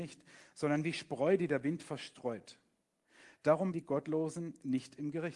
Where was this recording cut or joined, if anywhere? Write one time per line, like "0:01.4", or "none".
0:03.7